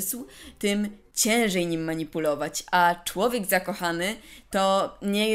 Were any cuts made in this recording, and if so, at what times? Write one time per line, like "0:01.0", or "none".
none